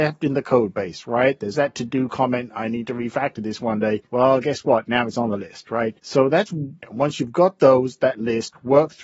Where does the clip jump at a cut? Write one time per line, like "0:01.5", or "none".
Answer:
0:01.5
0:04.1
0:06.0
0:06.8